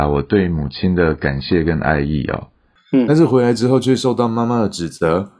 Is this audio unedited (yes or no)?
yes